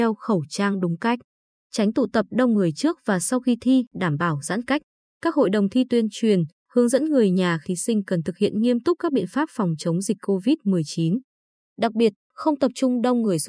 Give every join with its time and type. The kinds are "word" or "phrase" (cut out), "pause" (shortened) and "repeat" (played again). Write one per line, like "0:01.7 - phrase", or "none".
0:07.6 - phrase